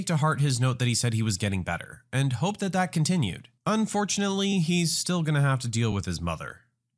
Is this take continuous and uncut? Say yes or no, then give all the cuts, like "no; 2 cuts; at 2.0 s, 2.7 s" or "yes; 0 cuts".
yes; 0 cuts